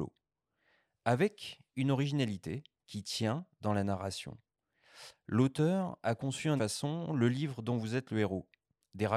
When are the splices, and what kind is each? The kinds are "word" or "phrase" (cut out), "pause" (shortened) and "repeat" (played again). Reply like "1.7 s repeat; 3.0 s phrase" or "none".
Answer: 6.6 s word